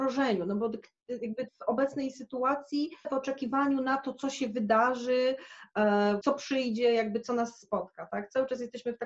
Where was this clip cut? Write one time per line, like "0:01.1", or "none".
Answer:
0:01.5
0:03.0
0:06.2